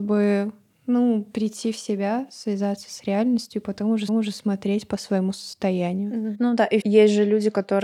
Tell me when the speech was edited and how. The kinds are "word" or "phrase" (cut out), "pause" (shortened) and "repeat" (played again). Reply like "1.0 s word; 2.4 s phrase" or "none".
4.1 s repeat; 6.8 s phrase